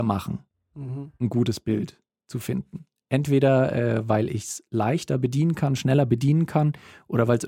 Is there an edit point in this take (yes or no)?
no